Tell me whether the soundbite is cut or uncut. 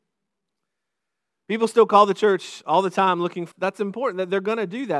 cut